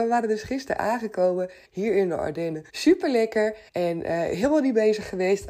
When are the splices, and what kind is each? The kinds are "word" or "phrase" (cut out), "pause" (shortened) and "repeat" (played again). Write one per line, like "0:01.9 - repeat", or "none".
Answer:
0:01.6 - pause
0:02.7 - pause
0:03.7 - pause

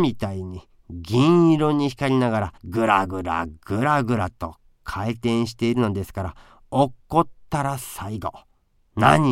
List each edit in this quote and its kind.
0:02.6 - pause
0:07.0 - pause

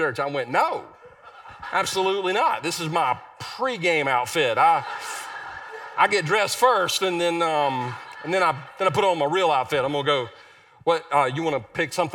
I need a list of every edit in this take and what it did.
none

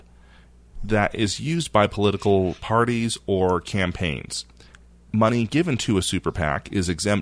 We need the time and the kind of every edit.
none

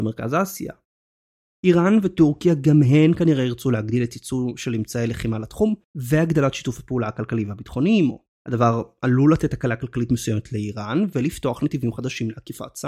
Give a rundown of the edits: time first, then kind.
0:05.8 - pause
0:08.4 - pause

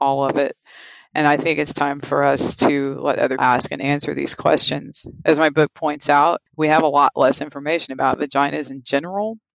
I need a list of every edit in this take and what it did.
0:03.4 - word
0:06.5 - pause

